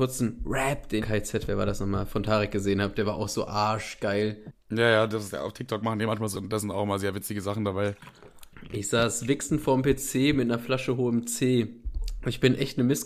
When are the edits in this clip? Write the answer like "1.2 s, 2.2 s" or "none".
1.0 s, 6.3 s